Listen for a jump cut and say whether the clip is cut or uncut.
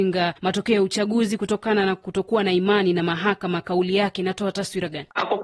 uncut